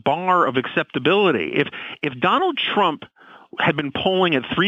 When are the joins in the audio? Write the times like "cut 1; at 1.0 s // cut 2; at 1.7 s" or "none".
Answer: none